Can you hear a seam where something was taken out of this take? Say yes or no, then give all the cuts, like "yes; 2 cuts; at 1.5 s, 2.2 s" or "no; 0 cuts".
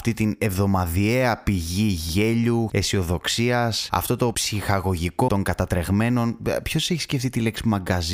yes; 2 cuts; at 2.7 s, 5.3 s